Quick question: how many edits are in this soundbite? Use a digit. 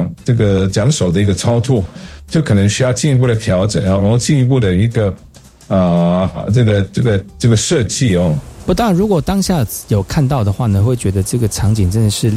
0